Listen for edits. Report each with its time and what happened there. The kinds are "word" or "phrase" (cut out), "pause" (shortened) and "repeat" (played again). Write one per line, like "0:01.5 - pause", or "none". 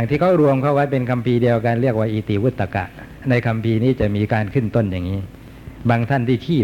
0:03.2 - phrase